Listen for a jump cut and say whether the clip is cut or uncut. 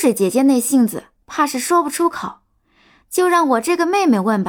uncut